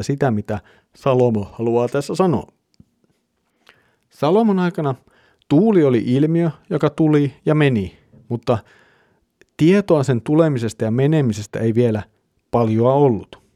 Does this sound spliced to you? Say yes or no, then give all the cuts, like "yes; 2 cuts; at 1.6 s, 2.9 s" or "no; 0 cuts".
no; 0 cuts